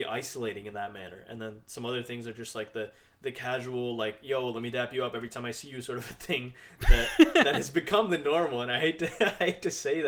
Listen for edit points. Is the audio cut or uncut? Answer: uncut